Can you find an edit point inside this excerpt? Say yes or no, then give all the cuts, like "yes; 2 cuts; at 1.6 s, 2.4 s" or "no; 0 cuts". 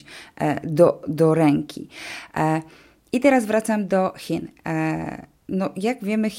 no; 0 cuts